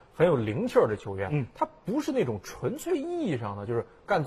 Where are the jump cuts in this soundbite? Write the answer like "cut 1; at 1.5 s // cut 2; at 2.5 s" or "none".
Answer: none